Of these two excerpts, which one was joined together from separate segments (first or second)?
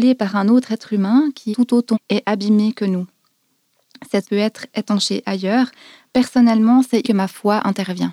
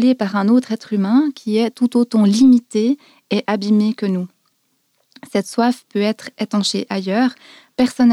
first